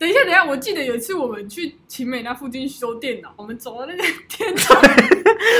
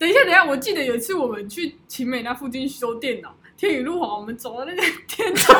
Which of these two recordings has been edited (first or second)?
first